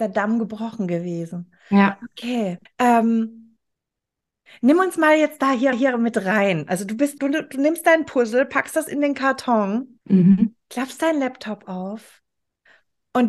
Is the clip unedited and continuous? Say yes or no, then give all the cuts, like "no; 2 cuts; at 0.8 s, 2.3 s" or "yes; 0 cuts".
no; 4 cuts; at 2.7 s, 5.7 s, 7.2 s, 10.0 s